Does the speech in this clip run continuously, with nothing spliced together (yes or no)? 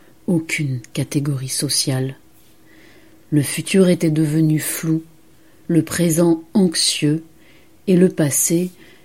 yes